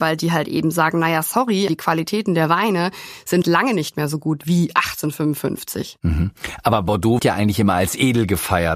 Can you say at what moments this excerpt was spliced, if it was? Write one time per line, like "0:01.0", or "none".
0:01.7
0:03.4
0:07.2